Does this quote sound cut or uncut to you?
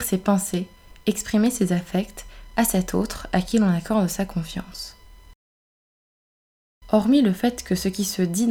uncut